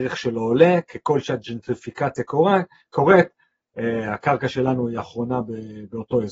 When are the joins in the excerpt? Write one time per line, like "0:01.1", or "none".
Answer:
none

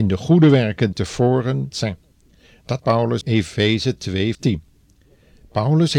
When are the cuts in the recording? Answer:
0:00.9
0:01.7
0:02.8
0:03.2
0:04.3

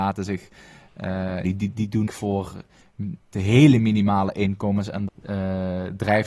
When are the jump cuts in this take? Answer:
0:01.4
0:02.1
0:03.3
0:05.1

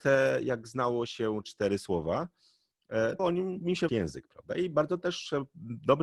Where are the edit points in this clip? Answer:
0:01.4
0:03.2
0:03.9

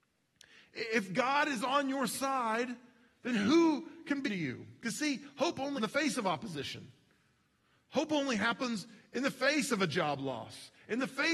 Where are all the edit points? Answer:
0:04.3
0:05.8

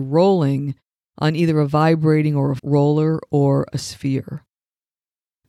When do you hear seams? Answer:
0:02.6

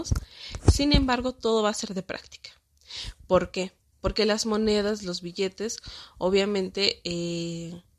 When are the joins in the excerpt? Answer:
none

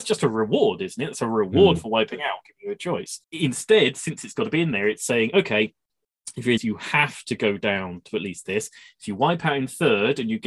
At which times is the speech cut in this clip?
0:03.2
0:06.6

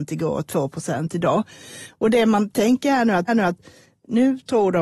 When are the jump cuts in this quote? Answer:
0:03.3

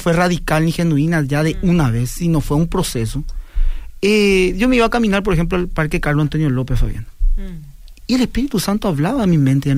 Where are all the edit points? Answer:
none

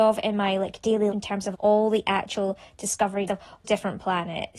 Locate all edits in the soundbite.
0:01.1
0:01.5
0:03.3
0:03.6

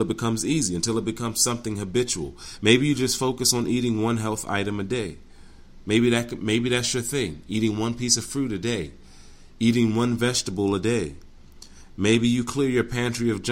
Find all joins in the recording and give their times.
none

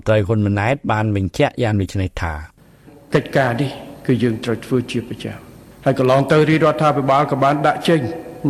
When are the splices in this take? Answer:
none

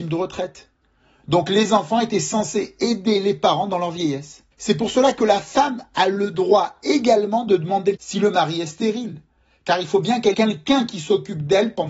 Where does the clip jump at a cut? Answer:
0:04.5
0:08.0
0:10.3

